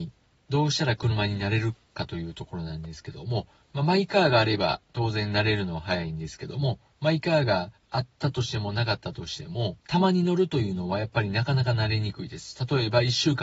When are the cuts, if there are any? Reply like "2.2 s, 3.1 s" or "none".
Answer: 9.8 s